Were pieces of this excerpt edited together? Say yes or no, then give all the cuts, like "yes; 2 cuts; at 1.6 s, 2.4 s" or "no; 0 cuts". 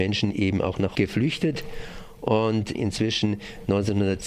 yes; 2 cuts; at 0.9 s, 2.7 s